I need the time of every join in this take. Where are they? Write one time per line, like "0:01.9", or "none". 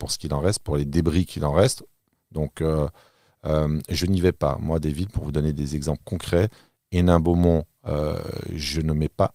none